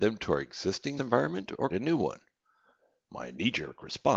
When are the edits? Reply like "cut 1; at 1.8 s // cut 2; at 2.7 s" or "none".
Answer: cut 1; at 1.0 s // cut 2; at 1.7 s